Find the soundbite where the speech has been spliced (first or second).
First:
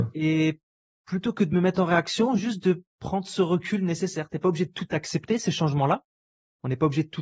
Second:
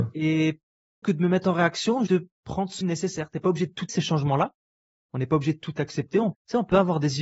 second